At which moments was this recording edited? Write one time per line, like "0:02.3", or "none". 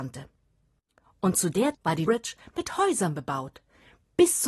0:01.7
0:02.1